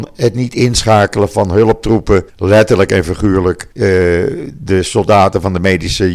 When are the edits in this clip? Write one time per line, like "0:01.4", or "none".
0:02.3
0:03.7